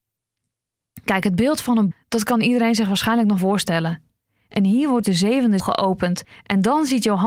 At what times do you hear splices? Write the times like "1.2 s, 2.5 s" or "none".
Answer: 1.9 s, 3.4 s, 5.0 s, 5.6 s